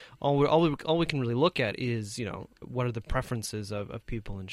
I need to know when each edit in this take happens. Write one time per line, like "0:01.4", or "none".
0:02.6